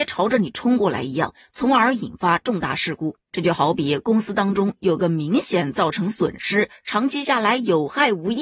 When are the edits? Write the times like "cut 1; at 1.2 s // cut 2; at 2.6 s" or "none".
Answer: cut 1; at 3.2 s